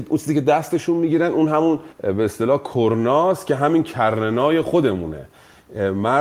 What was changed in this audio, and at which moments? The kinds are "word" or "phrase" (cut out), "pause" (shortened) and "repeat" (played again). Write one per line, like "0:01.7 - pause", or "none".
0:01.9 - pause